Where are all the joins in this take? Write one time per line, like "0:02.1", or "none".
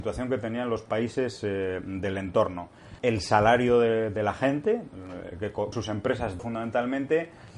0:03.0
0:05.7
0:06.4